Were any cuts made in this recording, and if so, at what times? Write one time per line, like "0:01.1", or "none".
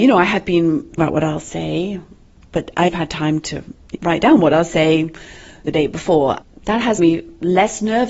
0:01.0
0:02.9
0:03.9
0:05.6
0:06.4
0:07.0